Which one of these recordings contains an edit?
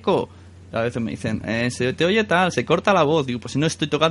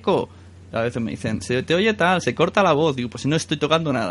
second; 1 cut; at 1.4 s

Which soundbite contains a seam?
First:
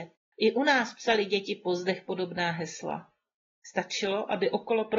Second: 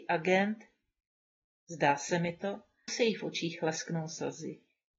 second; 1 cut; at 2.9 s

